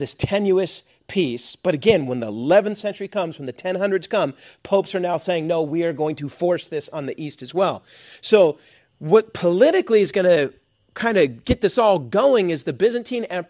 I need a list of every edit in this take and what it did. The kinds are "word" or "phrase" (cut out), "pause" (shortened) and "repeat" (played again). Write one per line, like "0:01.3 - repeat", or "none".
none